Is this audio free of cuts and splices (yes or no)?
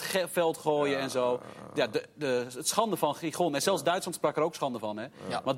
yes